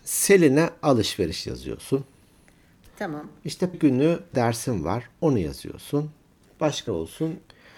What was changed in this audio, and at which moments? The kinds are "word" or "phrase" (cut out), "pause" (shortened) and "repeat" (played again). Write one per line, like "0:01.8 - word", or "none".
0:03.7 - word
0:04.3 - word
0:06.9 - word